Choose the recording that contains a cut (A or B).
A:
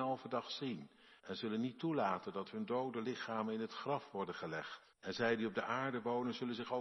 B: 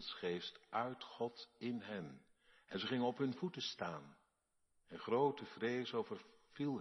A